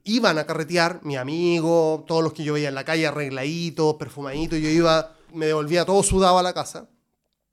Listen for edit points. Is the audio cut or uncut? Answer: cut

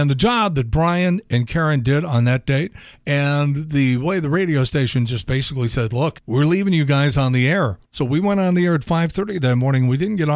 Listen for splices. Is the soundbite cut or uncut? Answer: uncut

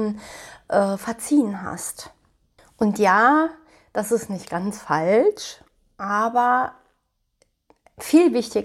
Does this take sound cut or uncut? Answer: uncut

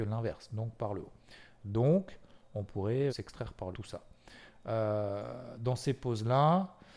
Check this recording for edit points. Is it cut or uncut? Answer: cut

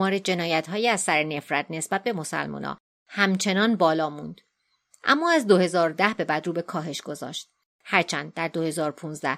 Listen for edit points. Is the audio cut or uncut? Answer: uncut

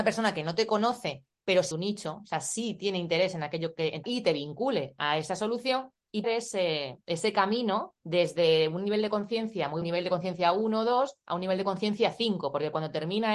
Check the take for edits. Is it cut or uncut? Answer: cut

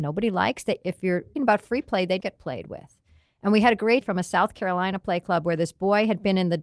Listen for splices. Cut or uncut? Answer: cut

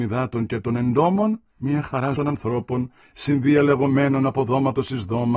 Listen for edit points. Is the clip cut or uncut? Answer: cut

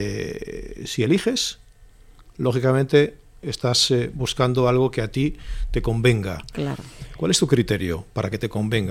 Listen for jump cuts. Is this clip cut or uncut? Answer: uncut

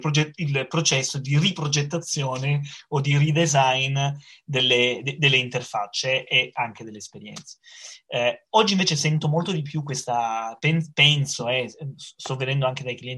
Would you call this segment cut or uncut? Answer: uncut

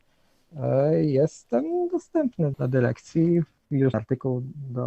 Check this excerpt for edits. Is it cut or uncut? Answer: cut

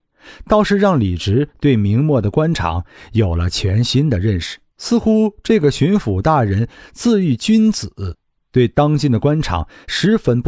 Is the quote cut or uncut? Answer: cut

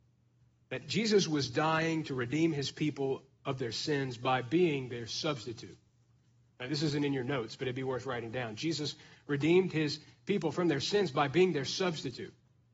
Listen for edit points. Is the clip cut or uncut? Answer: uncut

